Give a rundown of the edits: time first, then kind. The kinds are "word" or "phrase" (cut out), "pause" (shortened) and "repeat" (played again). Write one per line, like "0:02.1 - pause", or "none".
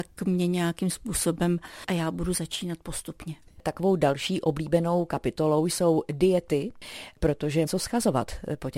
0:01.9 - phrase
0:07.7 - word